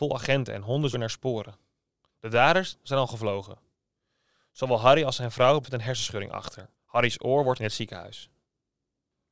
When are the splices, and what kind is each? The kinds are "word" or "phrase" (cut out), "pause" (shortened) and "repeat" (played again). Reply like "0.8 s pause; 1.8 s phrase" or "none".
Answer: 0.9 s word; 5.6 s word; 6.7 s pause; 7.6 s word